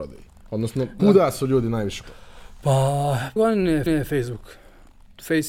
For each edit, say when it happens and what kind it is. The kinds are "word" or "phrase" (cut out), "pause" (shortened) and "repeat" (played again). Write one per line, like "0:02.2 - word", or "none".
0:01.0 - word
0:02.0 - word
0:03.4 - word
0:03.9 - repeat